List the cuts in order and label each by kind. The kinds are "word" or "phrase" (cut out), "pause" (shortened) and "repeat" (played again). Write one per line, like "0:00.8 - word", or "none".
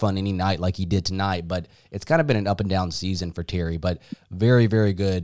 none